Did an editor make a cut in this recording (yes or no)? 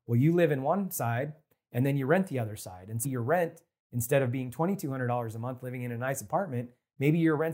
yes